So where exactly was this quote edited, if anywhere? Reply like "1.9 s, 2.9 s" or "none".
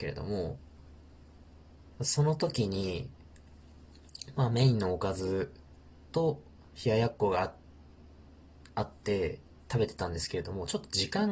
none